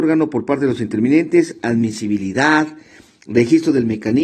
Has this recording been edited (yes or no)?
no